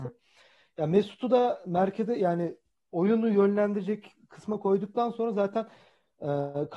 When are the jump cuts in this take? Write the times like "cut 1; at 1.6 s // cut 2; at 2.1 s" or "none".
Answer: none